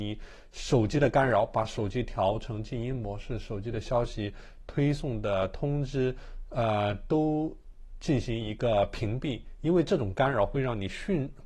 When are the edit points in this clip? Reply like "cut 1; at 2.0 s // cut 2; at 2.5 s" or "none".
none

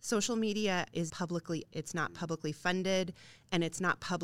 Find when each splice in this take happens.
cut 1; at 1.1 s // cut 2; at 1.7 s

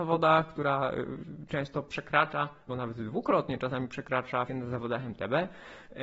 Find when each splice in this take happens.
cut 1; at 2.7 s // cut 2; at 4.5 s

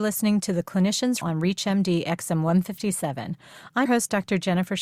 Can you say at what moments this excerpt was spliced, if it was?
cut 1; at 1.2 s // cut 2; at 3.9 s

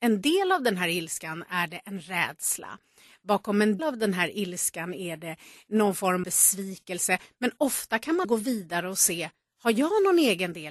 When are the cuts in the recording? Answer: cut 1; at 3.8 s // cut 2; at 6.2 s // cut 3; at 8.2 s

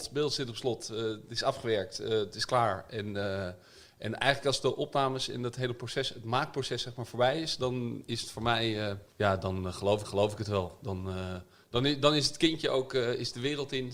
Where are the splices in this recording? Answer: cut 1; at 9.1 s // cut 2; at 10.0 s

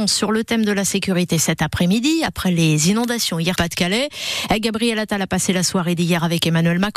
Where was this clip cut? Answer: cut 1; at 3.6 s

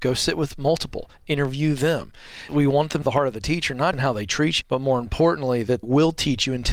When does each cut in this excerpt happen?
cut 1; at 2.5 s // cut 2; at 3.0 s // cut 3; at 3.9 s // cut 4; at 4.6 s // cut 5; at 5.8 s

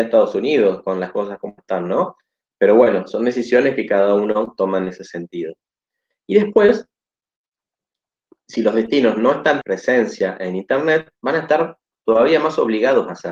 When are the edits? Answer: cut 1; at 9.6 s

